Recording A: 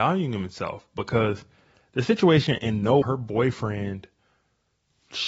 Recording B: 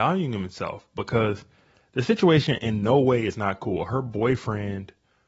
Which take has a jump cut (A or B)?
A